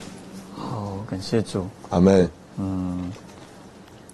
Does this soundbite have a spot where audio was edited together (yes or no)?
no